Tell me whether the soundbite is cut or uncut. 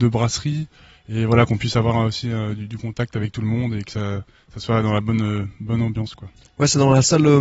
uncut